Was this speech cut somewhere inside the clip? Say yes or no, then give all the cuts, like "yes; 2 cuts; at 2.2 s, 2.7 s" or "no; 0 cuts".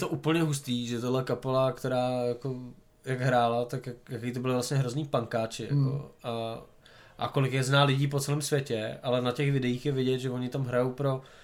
no; 0 cuts